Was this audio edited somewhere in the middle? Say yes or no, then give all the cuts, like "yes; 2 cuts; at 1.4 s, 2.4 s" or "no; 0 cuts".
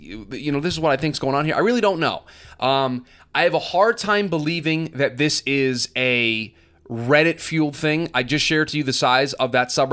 no; 0 cuts